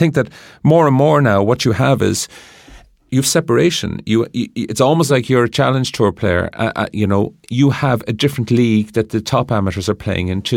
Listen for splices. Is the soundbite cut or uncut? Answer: uncut